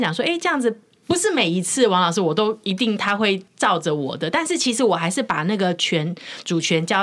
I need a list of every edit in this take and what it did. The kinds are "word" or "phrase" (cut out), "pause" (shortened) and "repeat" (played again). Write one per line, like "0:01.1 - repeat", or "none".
0:03.5 - pause